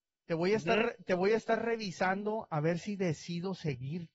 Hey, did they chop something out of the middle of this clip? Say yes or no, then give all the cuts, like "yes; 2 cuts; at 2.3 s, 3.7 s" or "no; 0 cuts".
no; 0 cuts